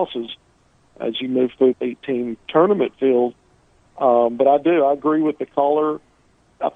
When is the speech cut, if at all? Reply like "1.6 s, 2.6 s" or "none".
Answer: 1.7 s, 2.9 s